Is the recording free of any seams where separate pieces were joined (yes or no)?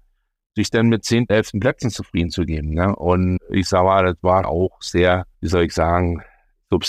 no